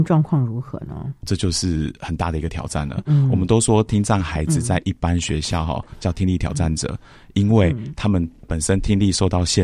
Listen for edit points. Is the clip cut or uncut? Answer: uncut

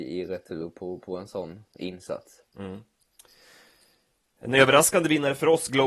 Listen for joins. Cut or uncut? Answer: cut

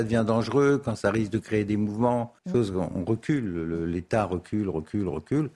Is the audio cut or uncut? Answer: cut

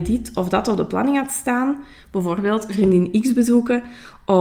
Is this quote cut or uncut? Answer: uncut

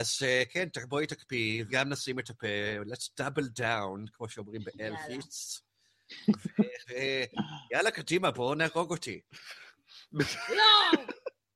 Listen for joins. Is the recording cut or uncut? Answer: cut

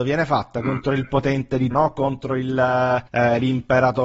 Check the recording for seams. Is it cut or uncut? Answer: cut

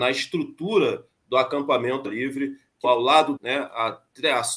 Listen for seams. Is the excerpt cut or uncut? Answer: cut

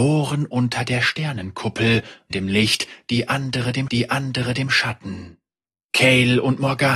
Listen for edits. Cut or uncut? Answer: cut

